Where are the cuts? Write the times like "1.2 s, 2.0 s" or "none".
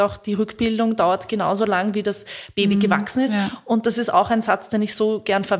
none